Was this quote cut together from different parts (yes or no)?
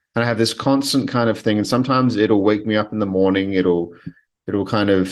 no